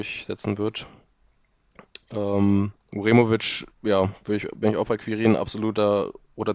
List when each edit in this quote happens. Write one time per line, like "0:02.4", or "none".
0:03.7